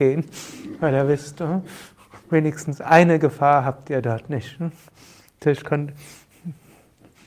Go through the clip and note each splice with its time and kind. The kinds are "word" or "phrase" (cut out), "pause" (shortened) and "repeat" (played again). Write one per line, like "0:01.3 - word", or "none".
none